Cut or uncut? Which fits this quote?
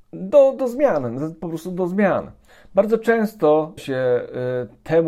cut